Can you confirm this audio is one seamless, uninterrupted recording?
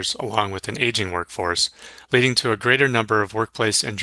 yes; 0 cuts

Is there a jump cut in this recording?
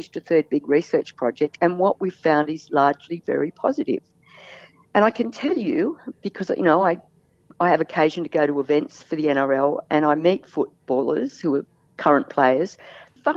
no; 0 cuts

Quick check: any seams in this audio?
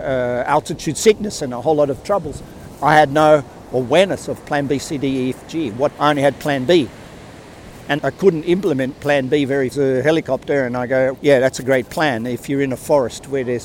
yes; 4 cuts; at 6.0 s, 8.0 s, 9.7 s, 11.1 s

